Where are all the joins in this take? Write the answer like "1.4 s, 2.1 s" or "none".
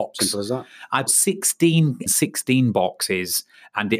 1.1 s, 2.1 s